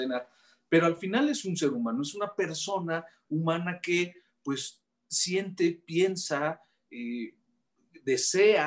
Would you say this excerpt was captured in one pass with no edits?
yes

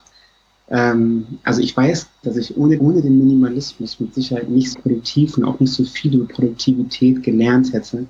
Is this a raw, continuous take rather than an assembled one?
no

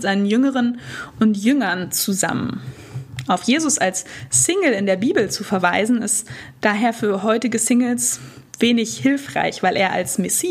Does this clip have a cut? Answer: no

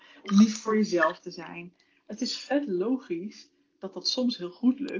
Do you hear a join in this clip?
no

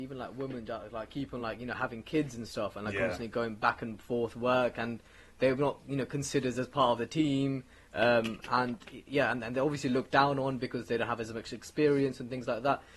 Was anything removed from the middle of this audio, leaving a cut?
no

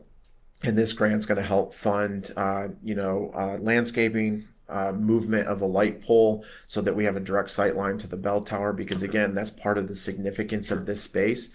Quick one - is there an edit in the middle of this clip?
no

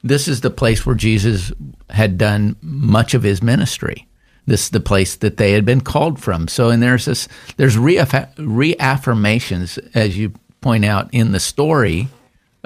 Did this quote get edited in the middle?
no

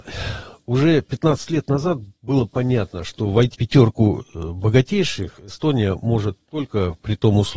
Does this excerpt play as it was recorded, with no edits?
no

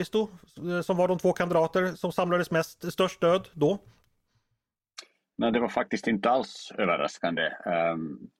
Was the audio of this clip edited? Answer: no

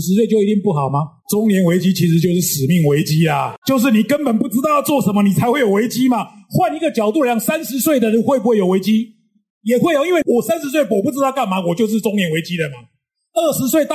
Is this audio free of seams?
no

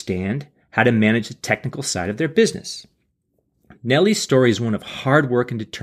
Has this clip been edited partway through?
no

